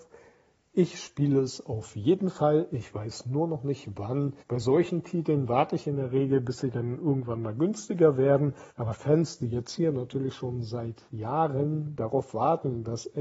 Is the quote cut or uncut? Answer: cut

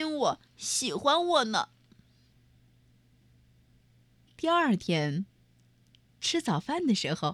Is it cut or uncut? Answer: uncut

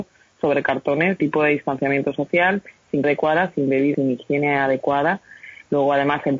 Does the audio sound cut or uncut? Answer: cut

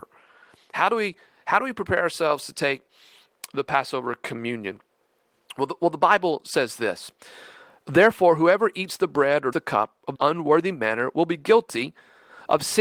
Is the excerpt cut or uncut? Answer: cut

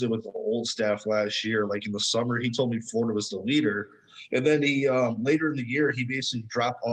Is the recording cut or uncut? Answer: uncut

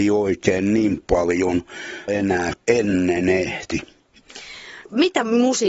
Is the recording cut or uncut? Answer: cut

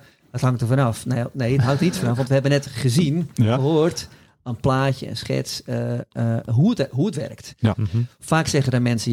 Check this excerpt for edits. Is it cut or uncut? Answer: uncut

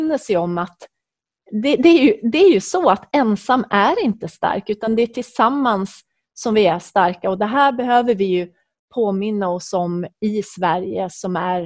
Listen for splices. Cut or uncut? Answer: uncut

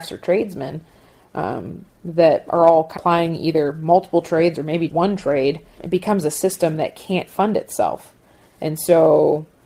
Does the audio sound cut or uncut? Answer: cut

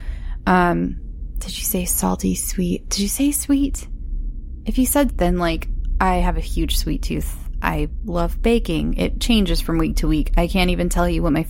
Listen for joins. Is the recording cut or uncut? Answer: cut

